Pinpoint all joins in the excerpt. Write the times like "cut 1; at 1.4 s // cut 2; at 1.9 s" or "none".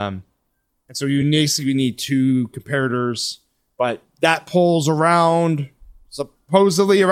none

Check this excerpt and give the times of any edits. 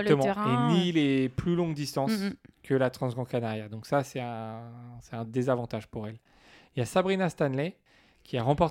none

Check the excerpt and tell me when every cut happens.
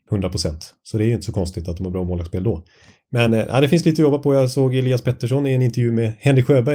none

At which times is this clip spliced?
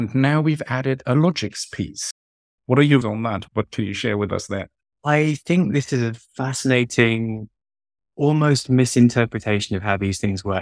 cut 1; at 3.0 s // cut 2; at 4.8 s

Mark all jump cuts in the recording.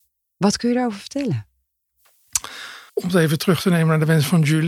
cut 1; at 2.9 s

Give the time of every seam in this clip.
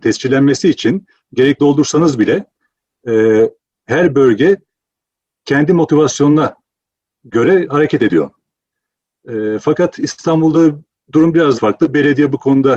cut 1; at 1.6 s // cut 2; at 11.5 s

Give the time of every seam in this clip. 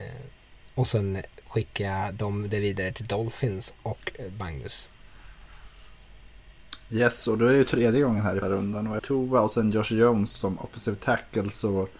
cut 1; at 8.4 s // cut 2; at 9.0 s

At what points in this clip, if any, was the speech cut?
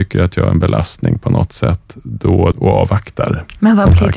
cut 1; at 2.5 s

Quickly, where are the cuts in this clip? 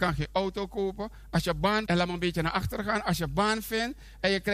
cut 1; at 1.9 s

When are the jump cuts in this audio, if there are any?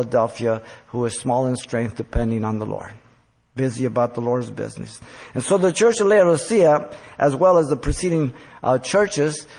none

